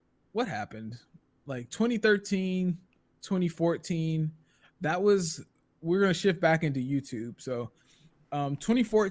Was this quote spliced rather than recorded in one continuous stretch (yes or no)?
no